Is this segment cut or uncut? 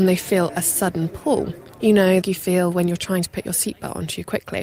cut